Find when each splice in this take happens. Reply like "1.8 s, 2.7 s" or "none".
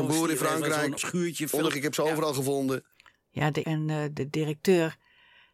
1.0 s, 1.7 s, 3.6 s

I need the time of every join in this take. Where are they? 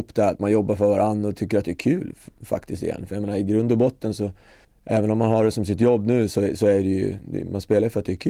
4.6 s

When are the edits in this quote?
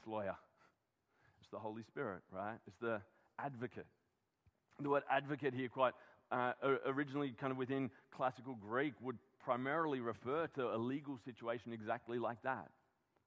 none

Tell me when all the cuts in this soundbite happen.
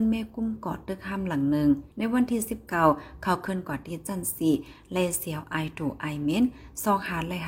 1.9 s

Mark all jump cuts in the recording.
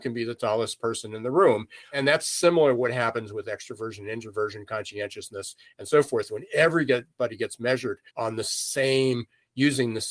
8.1 s

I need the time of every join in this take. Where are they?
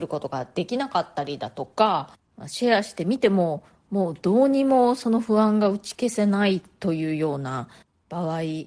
none

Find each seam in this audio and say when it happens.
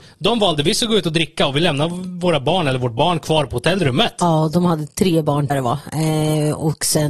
5.5 s

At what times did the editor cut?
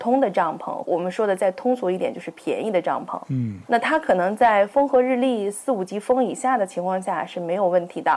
none

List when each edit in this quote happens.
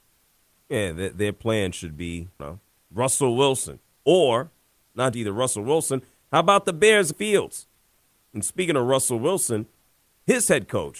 2.4 s, 3.9 s, 5.1 s, 7.1 s

